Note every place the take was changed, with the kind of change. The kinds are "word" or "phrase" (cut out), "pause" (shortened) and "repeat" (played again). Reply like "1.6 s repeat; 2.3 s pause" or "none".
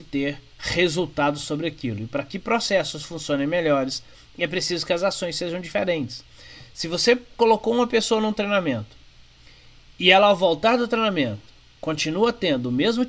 none